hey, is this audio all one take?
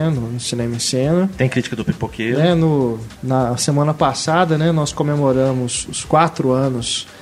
yes; 0 cuts

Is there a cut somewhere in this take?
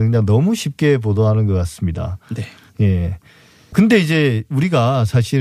no; 0 cuts

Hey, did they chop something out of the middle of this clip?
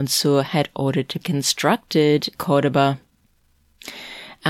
yes; 2 cuts; at 1.2 s, 2.3 s

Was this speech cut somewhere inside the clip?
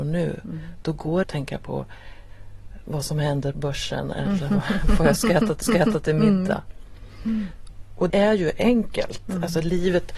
yes; 4 cuts; at 1.2 s, 3.5 s, 5.6 s, 8.1 s

